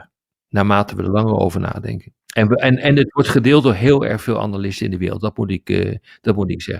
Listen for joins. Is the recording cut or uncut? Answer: cut